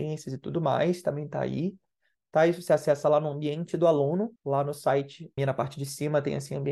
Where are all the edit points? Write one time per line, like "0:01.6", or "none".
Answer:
0:04.4
0:05.4